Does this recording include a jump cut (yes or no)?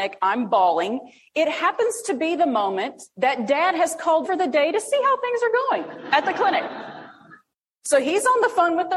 yes